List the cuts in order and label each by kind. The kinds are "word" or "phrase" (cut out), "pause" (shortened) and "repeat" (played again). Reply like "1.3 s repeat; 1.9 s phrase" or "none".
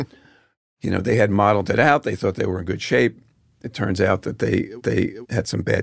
4.8 s repeat